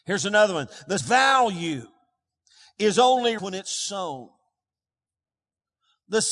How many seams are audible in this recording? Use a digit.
2